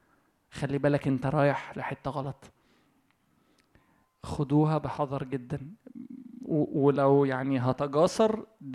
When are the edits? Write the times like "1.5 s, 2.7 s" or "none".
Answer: none